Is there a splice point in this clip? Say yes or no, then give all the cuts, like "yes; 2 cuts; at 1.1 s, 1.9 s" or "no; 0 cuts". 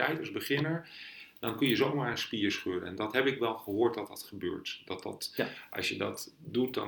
no; 0 cuts